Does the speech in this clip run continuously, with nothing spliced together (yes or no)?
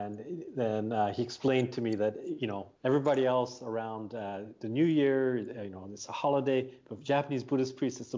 no